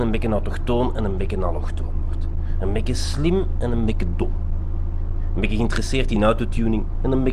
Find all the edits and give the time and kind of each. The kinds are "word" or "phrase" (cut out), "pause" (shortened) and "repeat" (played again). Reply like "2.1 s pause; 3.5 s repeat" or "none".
none